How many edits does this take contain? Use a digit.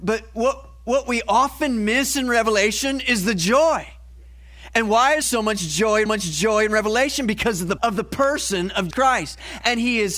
4